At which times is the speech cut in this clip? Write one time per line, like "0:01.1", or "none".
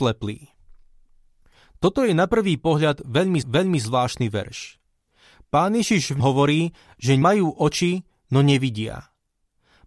0:03.4
0:06.2
0:07.2